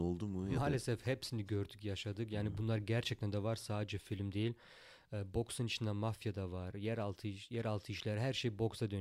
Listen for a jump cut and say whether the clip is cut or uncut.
uncut